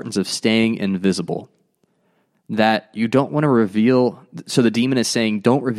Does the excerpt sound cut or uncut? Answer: uncut